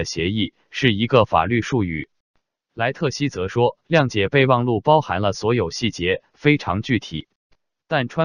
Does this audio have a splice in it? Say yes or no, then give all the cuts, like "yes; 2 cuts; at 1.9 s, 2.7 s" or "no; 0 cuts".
yes; 1 cut; at 3.8 s